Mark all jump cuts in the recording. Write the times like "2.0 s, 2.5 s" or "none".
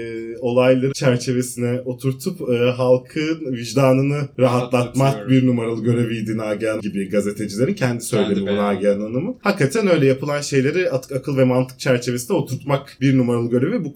0.9 s, 6.8 s